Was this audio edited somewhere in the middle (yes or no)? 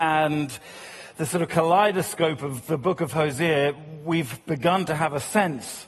no